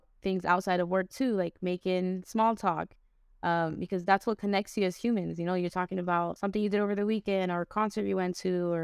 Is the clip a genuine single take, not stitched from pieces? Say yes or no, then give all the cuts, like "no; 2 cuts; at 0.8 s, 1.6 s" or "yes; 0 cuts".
yes; 0 cuts